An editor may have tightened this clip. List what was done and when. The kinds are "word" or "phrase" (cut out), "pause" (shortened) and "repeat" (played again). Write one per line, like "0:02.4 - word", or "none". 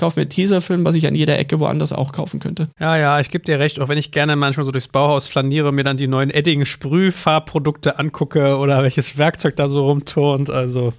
none